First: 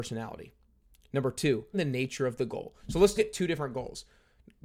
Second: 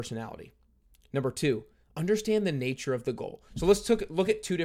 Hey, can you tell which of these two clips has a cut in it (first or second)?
first